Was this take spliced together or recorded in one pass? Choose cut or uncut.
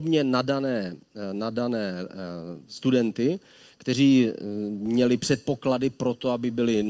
uncut